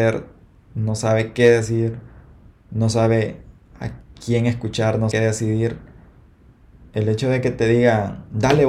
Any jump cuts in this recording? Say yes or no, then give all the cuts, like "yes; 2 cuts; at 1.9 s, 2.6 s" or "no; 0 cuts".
yes; 1 cut; at 5.1 s